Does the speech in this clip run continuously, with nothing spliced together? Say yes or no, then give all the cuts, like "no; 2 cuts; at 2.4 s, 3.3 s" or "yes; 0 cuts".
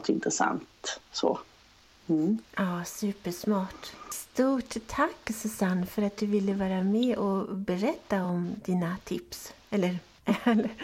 yes; 0 cuts